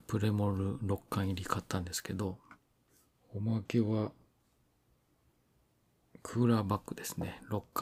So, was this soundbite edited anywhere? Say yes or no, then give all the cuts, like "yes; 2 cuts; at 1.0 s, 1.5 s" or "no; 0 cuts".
yes; 1 cut; at 2.9 s